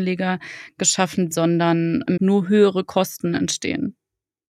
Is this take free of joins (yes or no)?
no